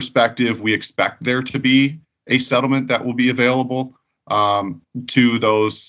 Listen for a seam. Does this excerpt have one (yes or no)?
no